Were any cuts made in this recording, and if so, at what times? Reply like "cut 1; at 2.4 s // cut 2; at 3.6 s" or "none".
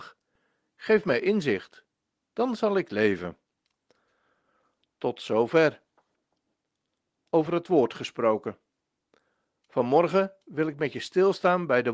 none